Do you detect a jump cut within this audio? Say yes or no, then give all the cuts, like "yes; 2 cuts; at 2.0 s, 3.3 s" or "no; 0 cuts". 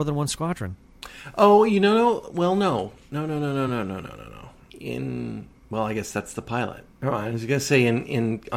no; 0 cuts